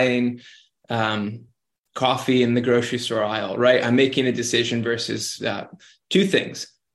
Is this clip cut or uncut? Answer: uncut